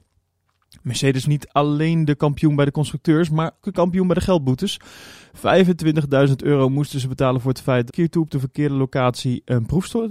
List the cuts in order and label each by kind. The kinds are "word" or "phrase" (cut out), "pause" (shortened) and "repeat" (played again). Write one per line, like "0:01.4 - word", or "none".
0:01.2 - word
0:03.6 - word
0:07.9 - phrase

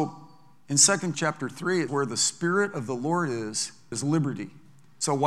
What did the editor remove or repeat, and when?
0:01.1 - word
0:01.9 - word
0:03.9 - word

